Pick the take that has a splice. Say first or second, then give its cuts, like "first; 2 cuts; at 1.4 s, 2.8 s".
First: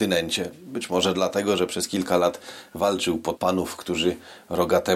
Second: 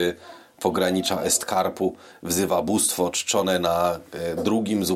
first; 1 cut; at 3.4 s